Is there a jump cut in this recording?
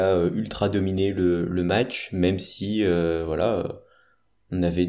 no; 0 cuts

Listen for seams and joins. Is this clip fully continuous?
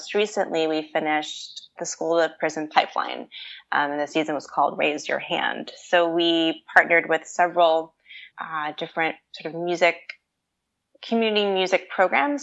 no; 2 cuts; at 1.8 s, 8.3 s

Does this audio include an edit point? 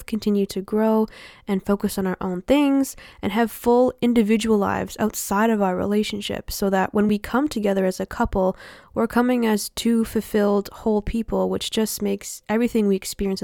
no; 0 cuts

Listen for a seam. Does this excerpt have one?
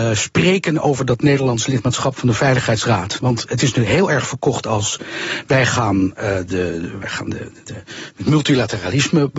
no; 0 cuts

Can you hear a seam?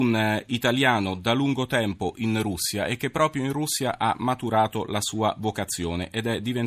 no; 0 cuts

